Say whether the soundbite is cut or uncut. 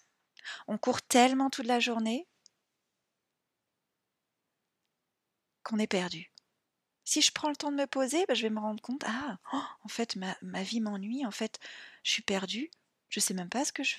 uncut